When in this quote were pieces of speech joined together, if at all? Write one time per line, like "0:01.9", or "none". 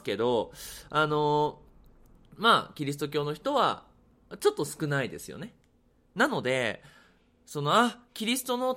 none